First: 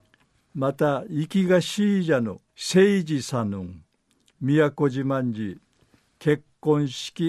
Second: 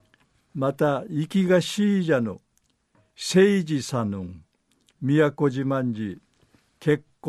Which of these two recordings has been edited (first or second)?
first